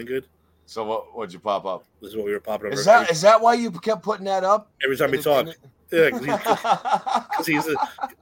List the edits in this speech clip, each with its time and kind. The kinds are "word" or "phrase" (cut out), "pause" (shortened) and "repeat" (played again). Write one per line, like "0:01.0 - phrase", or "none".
0:01.9 - pause
0:04.7 - pause
0:05.8 - pause